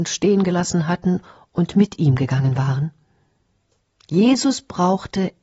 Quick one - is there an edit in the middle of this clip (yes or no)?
no